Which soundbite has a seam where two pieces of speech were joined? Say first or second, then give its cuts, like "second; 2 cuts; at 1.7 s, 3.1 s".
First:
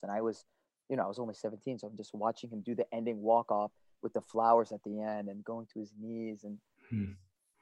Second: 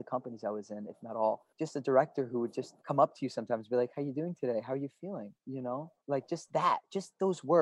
second; 4 cuts; at 1.5 s, 2.8 s, 5.4 s, 6.0 s